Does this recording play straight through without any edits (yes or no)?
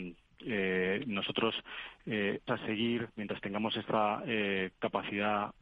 no